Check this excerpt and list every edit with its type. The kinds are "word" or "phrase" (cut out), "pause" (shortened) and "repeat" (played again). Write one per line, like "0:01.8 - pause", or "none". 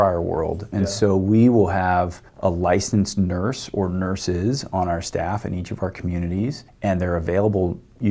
0:02.3 - pause
0:06.7 - pause